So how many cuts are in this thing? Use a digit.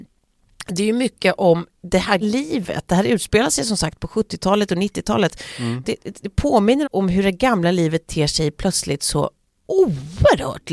3